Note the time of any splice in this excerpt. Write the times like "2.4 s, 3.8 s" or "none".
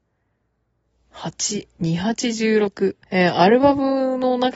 3.0 s